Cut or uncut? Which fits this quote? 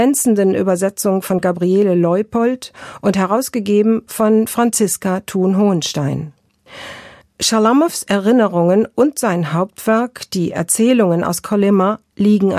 uncut